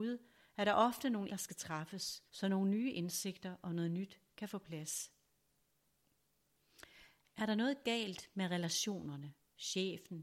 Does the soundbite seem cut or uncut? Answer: cut